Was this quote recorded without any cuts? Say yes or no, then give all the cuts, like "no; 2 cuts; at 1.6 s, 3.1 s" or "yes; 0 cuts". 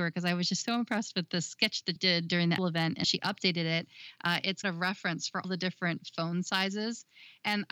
no; 5 cuts; at 2.0 s, 2.6 s, 3.0 s, 4.6 s, 5.4 s